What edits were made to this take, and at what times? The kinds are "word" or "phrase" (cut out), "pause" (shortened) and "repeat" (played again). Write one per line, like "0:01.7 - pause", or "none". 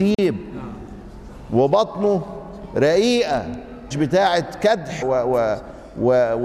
0:03.9 - word
0:05.0 - word